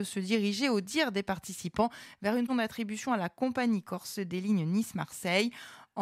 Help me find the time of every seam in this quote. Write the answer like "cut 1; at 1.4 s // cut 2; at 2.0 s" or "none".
cut 1; at 2.5 s